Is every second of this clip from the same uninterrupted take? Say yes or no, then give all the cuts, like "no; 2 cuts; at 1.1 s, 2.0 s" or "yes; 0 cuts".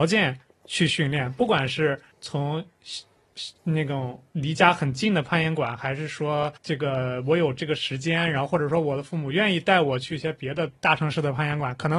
no; 2 cuts; at 2.1 s, 6.6 s